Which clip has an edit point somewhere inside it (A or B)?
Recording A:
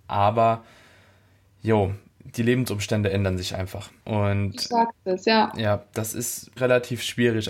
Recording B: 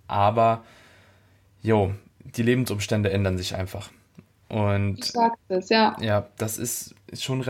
A